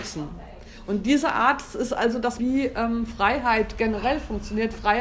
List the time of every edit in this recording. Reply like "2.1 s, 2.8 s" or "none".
2.4 s